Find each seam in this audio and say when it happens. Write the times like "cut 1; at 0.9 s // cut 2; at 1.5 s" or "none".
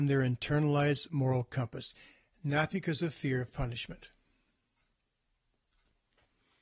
none